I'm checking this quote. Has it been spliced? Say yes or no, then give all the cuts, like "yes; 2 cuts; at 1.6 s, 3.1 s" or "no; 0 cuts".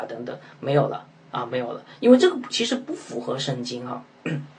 no; 0 cuts